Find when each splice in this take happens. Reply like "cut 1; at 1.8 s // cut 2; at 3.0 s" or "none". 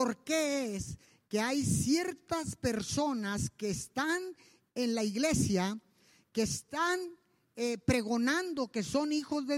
none